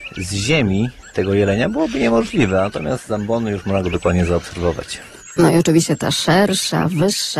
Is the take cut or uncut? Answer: uncut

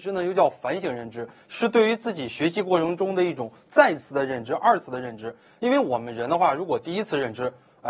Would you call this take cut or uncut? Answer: uncut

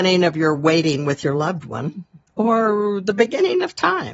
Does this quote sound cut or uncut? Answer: uncut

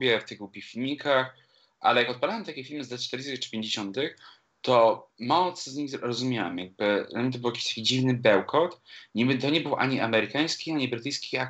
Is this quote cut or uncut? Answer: uncut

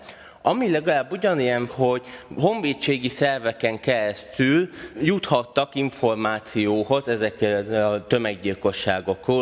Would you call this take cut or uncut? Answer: cut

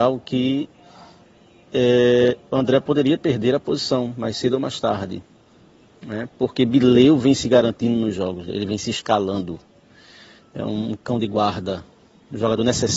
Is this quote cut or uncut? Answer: uncut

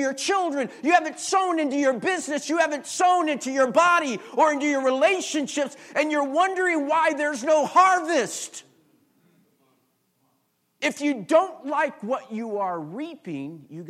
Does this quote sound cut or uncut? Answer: uncut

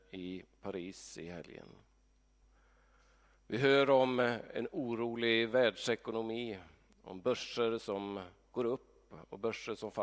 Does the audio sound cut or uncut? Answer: uncut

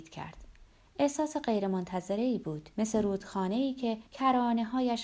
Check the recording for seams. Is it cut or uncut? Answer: cut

